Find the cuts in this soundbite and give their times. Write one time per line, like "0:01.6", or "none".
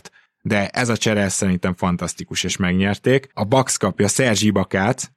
0:03.3